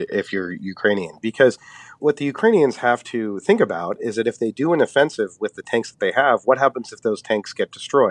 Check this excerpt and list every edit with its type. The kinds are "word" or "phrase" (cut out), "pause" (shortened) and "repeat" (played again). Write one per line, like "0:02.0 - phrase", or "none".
none

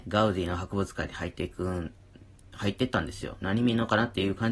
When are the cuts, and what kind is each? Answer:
none

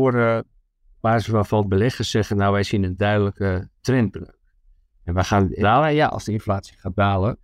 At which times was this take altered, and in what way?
0:05.6 - phrase

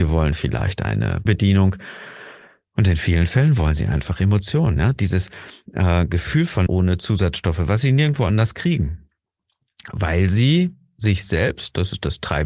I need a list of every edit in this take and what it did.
0:01.3 - word
0:06.7 - phrase

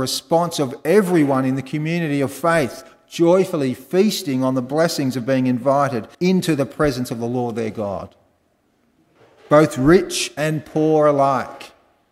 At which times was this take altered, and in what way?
0:06.1 - pause

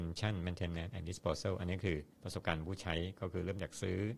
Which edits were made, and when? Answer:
0:02.1 - pause

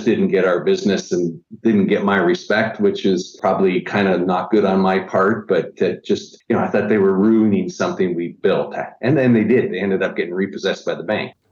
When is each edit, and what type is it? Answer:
none

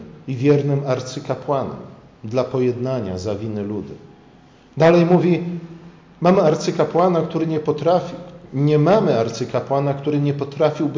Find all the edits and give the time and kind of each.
none

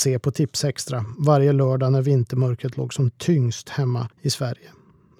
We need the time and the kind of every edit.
0:04.1 - pause

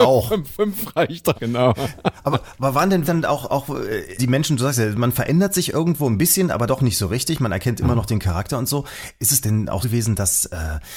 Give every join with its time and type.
0:01.3 - word
0:03.0 - word
0:04.2 - word
0:06.7 - word
0:09.4 - word
0:09.8 - word

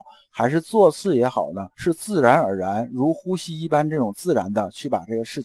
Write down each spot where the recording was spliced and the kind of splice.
0:01.7 - pause

